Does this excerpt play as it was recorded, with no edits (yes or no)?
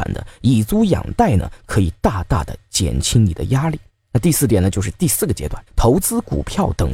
no